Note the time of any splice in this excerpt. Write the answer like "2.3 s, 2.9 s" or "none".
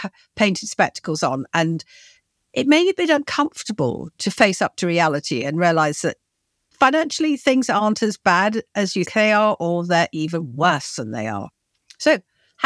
9.1 s